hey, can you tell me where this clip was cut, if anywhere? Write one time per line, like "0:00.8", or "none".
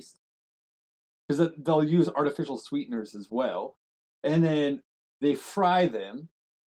none